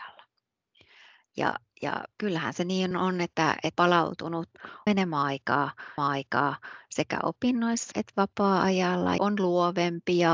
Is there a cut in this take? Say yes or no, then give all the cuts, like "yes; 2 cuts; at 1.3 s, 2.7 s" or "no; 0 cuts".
yes; 7 cuts; at 2.1 s, 2.9 s, 3.7 s, 4.9 s, 6.0 s, 7.9 s, 9.2 s